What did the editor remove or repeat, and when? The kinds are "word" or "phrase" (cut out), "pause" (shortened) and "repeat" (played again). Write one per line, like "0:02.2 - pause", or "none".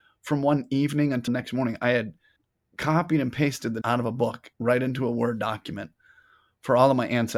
0:01.3 - word
0:02.4 - pause
0:03.8 - word
0:04.5 - pause

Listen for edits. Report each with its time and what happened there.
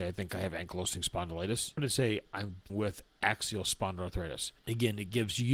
0:01.8 - word
0:02.7 - phrase
0:04.6 - pause

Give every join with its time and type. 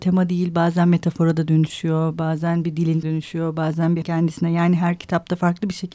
0:03.0 - word
0:04.0 - word

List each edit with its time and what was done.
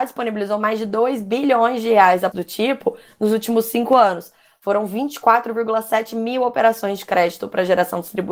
0:02.3 - word

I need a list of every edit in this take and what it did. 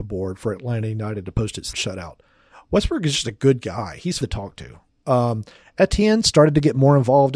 0:01.7 - word
0:04.2 - word

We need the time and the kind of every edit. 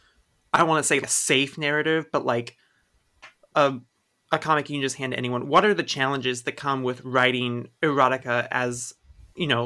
0:01.0 - word

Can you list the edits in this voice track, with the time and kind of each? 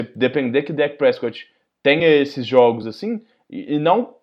none

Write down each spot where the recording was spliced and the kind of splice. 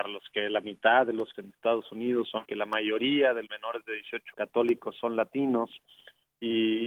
0:01.3 - word
0:02.4 - word
0:03.5 - word
0:04.3 - word

